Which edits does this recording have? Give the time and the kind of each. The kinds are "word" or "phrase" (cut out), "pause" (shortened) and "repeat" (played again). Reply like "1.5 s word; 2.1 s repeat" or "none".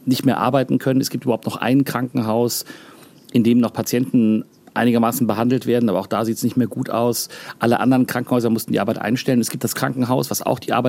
9.7 s word